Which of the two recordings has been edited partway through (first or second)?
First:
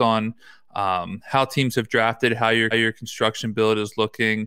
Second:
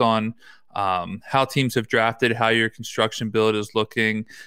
first